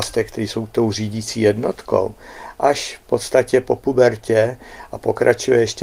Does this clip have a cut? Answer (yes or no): no